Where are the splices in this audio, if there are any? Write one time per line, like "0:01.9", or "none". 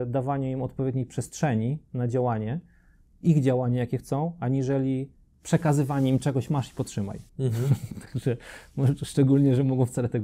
0:07.3